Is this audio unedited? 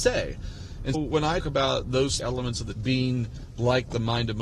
no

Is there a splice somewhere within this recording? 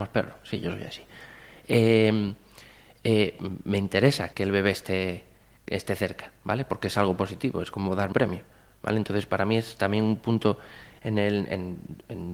yes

